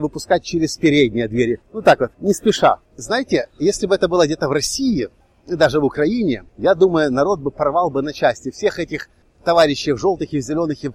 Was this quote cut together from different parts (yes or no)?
yes